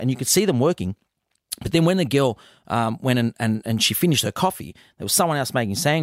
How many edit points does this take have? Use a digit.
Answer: 0